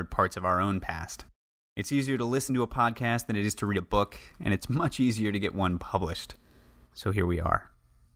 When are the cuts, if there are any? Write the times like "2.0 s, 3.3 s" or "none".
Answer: none